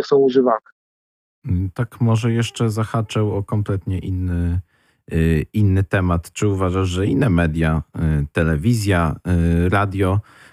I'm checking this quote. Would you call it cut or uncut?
uncut